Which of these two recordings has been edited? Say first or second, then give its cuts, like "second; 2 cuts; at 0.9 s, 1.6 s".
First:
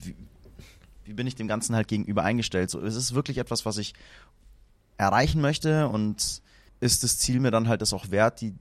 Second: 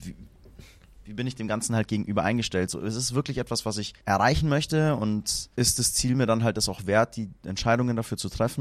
second; 3 cuts; at 4.0 s, 5.5 s, 7.4 s